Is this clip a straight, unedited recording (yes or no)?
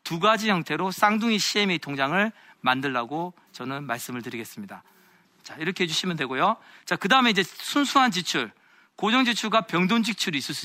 yes